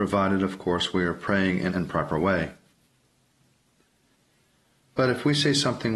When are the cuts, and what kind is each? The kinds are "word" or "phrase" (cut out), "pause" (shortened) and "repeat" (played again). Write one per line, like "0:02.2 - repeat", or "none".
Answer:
0:01.7 - phrase